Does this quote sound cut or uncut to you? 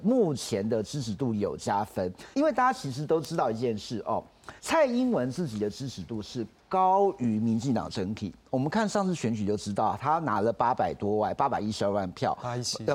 cut